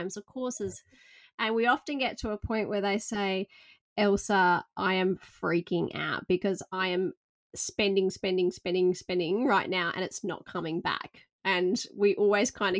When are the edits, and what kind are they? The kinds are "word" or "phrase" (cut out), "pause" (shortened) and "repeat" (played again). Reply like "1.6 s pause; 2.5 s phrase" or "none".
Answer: none